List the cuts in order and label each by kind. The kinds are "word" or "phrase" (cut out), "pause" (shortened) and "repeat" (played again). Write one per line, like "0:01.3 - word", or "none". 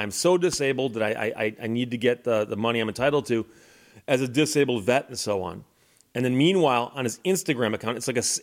none